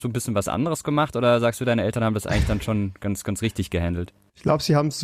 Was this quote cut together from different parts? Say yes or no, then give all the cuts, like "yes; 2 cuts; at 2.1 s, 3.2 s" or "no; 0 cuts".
no; 0 cuts